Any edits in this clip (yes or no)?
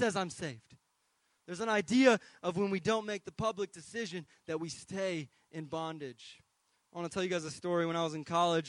no